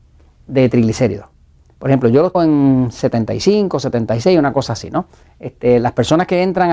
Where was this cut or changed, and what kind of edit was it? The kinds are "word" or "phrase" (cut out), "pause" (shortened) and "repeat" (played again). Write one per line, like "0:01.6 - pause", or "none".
0:02.3 - word